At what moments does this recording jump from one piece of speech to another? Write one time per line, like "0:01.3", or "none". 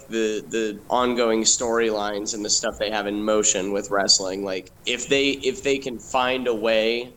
0:04.8